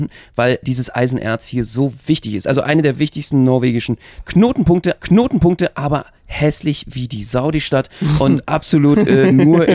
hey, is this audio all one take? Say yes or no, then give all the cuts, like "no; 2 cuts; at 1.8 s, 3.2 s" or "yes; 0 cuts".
no; 1 cut; at 5.0 s